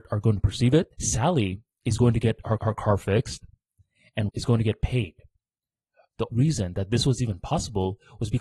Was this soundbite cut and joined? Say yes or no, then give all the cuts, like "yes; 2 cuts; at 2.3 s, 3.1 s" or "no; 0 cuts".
yes; 4 cuts; at 0.9 s, 2.6 s, 4.3 s, 6.3 s